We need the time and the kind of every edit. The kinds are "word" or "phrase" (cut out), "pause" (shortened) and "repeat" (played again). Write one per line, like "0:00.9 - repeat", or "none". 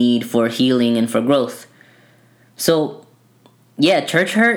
none